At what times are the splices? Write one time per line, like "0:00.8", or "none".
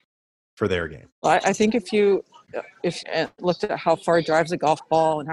0:01.1
0:03.0